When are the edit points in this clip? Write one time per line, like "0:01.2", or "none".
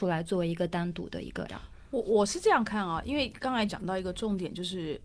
0:01.5
0:03.7